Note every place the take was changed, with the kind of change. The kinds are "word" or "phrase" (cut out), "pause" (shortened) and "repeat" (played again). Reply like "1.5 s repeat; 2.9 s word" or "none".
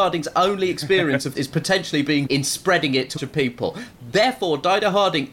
1.3 s word; 2.3 s word; 3.2 s phrase